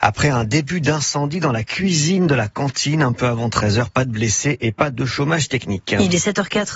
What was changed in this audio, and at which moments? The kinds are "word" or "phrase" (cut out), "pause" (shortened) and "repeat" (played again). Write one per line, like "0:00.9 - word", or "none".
none